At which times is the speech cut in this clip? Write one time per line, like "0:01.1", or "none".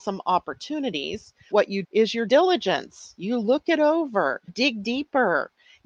0:01.5
0:01.8
0:02.3
0:04.5